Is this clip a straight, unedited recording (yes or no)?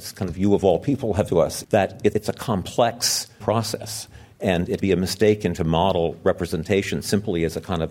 no